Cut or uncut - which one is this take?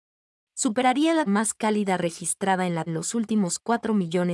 cut